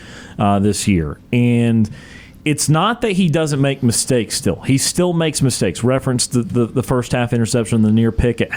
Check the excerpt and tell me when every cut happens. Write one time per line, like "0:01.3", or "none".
none